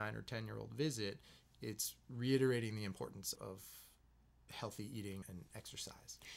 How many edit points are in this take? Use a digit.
2